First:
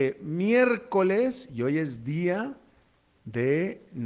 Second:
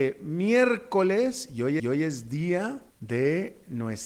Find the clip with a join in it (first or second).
second